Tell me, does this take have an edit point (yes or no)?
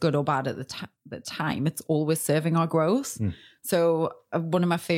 no